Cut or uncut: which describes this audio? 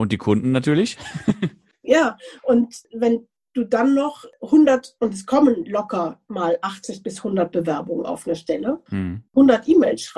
uncut